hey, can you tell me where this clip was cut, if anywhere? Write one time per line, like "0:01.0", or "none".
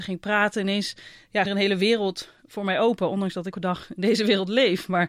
0:01.4
0:03.5